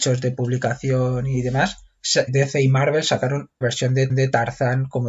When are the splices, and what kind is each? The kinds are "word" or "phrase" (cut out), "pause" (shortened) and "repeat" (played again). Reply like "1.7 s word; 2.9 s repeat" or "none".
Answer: 2.3 s word; 3.6 s word; 4.1 s repeat